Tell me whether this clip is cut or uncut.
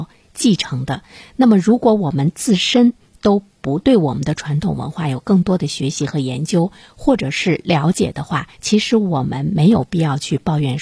cut